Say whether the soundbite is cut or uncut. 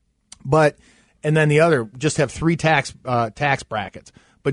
uncut